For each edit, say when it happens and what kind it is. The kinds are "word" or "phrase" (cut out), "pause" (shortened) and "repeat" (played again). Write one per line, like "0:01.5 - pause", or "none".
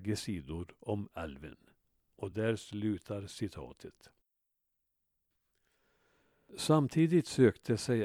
none